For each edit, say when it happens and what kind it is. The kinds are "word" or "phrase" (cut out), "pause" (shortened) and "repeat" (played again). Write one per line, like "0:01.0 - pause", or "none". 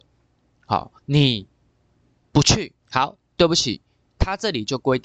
0:01.0 - pause
0:02.8 - pause